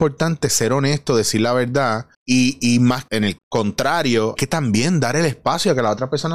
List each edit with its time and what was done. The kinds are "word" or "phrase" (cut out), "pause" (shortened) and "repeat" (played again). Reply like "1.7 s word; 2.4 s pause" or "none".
2.1 s pause; 3.1 s phrase; 3.4 s word; 4.4 s word